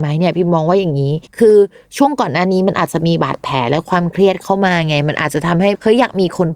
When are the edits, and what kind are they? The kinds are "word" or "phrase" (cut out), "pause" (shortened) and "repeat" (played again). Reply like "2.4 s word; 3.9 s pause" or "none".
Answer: 1.3 s pause